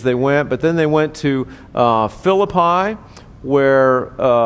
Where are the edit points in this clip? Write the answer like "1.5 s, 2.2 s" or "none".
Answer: none